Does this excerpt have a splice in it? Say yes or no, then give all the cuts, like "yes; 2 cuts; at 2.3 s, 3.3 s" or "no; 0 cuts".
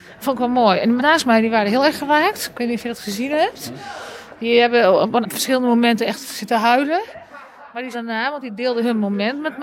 yes; 3 cuts; at 1.0 s, 5.2 s, 7.9 s